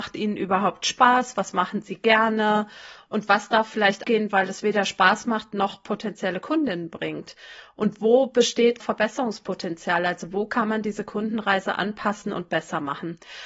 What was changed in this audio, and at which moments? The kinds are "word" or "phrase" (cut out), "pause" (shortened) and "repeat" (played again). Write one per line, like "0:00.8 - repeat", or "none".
0:04.0 - word
0:08.8 - word